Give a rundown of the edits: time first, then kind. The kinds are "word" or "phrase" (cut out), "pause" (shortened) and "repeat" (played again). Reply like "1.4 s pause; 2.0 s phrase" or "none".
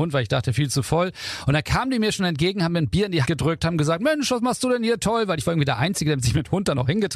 3.2 s word